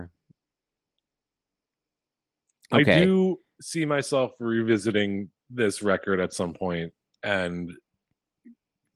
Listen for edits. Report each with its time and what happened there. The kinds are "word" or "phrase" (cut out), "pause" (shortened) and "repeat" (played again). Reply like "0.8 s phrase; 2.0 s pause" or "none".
5.4 s pause

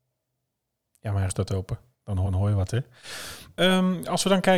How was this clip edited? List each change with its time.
1.3 s word; 2.3 s repeat

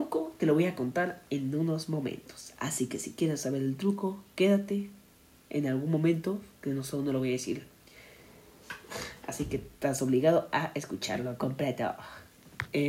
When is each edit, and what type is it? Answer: none

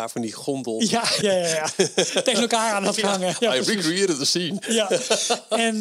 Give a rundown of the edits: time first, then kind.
1.2 s word

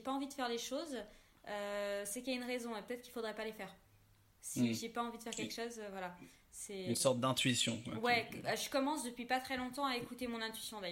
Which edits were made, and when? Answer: none

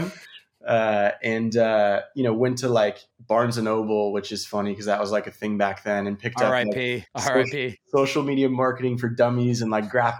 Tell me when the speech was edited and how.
3.1 s pause; 7.1 s pause

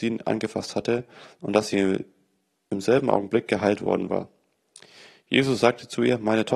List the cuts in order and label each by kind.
none

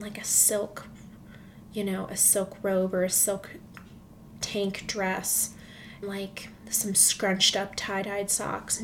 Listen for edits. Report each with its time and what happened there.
6.0 s word

